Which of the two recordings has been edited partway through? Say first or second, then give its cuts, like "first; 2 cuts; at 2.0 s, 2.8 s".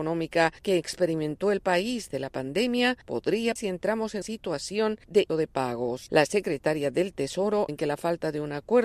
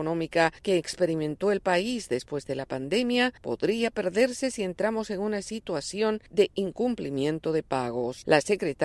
first; 5 cuts; at 2.1 s, 3.6 s, 4.2 s, 5.3 s, 7.7 s